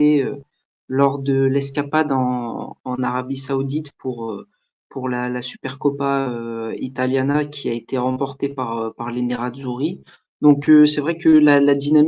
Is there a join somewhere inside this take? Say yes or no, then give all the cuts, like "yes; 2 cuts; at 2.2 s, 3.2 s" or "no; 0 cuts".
no; 0 cuts